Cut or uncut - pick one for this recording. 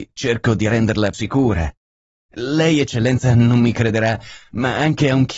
cut